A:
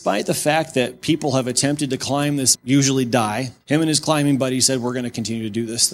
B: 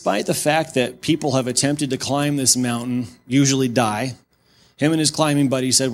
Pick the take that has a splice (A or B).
A